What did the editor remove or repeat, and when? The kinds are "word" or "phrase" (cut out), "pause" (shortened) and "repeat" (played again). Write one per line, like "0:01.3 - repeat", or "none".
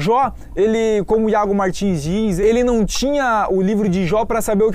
none